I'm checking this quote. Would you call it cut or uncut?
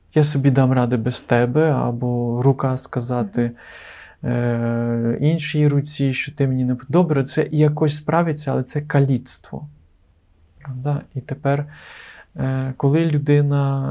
uncut